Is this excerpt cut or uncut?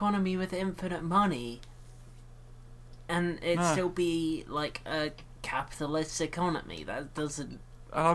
uncut